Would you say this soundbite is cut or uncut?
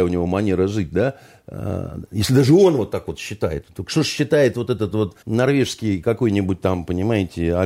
cut